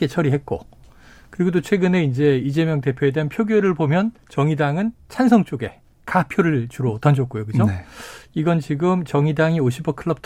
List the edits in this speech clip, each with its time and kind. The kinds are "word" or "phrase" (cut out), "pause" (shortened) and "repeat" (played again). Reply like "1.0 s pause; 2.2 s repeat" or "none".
4.2 s pause; 5.9 s pause

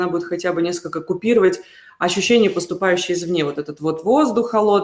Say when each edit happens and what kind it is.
none

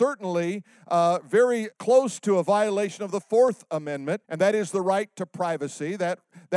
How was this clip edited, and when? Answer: 1.7 s pause; 4.2 s pause

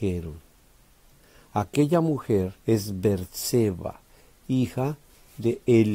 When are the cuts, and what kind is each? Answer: 2.6 s pause

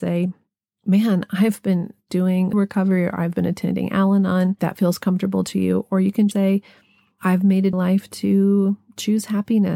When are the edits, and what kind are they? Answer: 2.5 s word; 4.6 s word; 6.3 s word; 7.7 s phrase

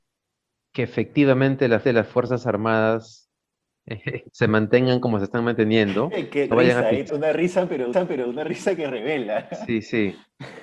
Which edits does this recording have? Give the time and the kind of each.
1.8 s repeat; 4.3 s pause; 6.5 s phrase; 7.1 s word; 7.9 s repeat

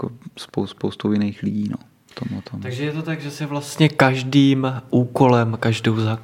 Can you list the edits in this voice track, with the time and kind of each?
none

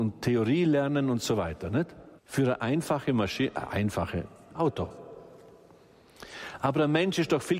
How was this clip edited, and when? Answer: 2.2 s pause; 4.5 s word

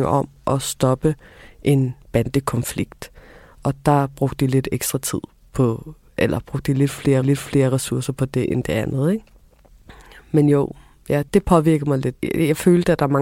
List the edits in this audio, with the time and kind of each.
7.2 s repeat; 11.3 s word

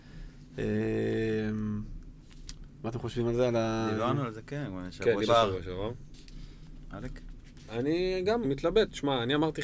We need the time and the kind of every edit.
5.3 s word; 8.4 s word

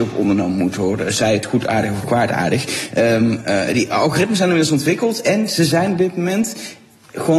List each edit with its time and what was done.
none

